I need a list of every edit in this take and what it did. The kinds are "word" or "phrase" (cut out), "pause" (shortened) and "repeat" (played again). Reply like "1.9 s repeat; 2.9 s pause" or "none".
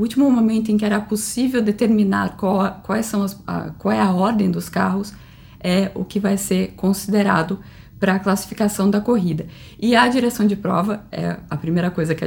none

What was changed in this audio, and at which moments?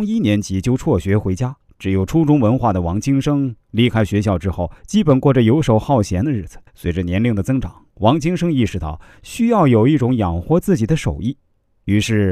1.7 s pause; 4.8 s pause; 6.7 s pause; 7.9 s pause

